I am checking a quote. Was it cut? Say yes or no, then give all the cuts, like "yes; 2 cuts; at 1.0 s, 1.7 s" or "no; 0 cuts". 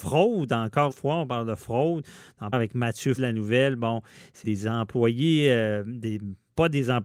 yes; 4 cuts; at 0.9 s, 2.5 s, 3.2 s, 4.4 s